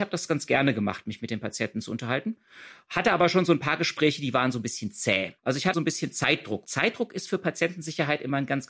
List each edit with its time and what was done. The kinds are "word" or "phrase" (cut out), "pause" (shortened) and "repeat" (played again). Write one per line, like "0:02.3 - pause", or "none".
0:05.4 - pause
0:05.7 - word
0:06.6 - word